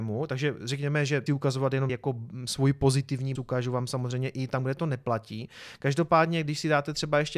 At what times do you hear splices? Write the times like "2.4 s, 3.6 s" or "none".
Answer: 1.3 s, 1.9 s, 3.4 s

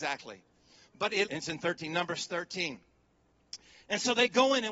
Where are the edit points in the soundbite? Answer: 1.3 s

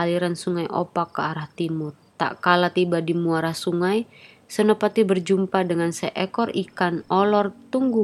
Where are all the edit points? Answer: 2.1 s

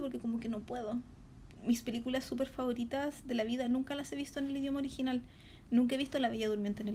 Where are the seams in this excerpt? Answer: none

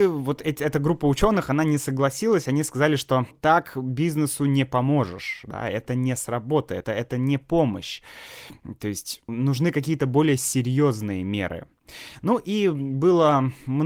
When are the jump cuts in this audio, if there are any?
3.3 s, 6.8 s, 9.3 s

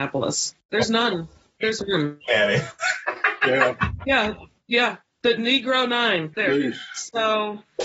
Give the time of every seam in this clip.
1.8 s, 2.3 s, 5.4 s, 6.3 s

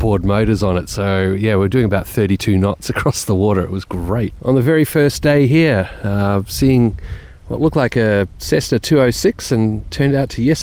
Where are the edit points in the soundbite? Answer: none

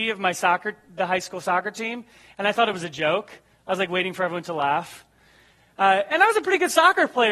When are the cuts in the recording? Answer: none

